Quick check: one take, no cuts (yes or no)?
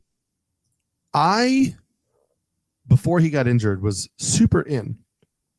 yes